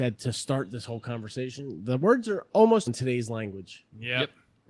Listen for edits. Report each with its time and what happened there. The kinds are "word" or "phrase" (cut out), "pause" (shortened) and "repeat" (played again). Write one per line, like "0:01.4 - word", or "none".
0:02.9 - word

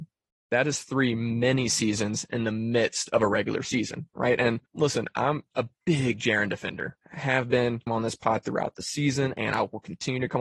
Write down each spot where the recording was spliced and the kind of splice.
0:04.7 - pause
0:05.7 - pause
0:07.0 - pause
0:07.9 - word

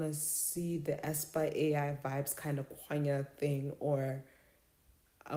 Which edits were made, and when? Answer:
none

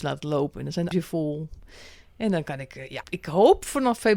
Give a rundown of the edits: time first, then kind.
0:00.9 - word
0:03.0 - word

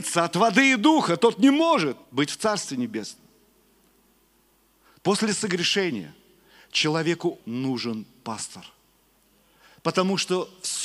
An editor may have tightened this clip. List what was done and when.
0:02.0 - pause
0:07.4 - word

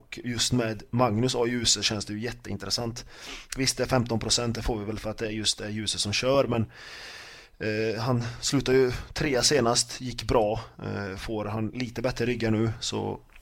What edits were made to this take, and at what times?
none

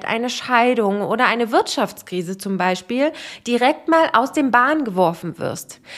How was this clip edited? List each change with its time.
none

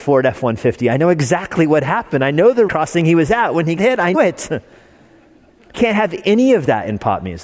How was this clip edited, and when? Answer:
0:02.7 - word
0:03.8 - word
0:04.1 - word
0:05.7 - word

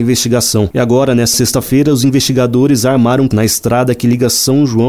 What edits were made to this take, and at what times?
0:01.3 - word
0:03.3 - word

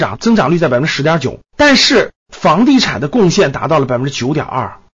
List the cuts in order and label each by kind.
0:01.4 - pause
0:02.2 - pause

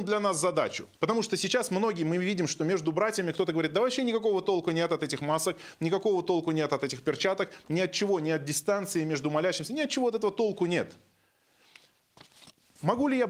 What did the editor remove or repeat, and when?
0:00.9 - pause

